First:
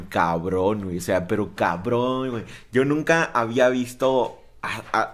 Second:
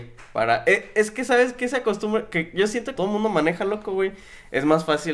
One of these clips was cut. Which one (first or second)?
second